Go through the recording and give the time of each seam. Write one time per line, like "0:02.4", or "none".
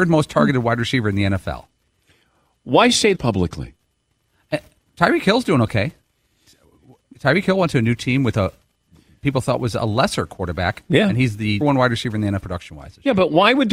0:03.1
0:11.6
0:12.4